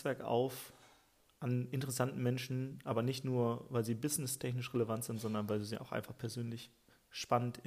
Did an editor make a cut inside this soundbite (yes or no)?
no